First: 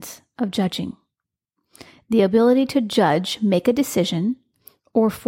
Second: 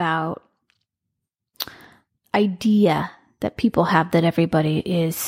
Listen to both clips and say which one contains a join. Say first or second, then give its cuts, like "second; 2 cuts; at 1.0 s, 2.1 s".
second; 1 cut; at 2.2 s